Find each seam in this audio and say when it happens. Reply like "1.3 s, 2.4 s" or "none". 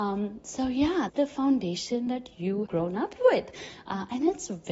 1.1 s, 2.7 s